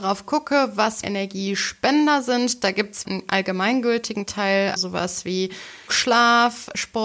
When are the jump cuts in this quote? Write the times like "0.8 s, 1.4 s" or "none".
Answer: 1.0 s, 3.0 s, 4.8 s, 5.9 s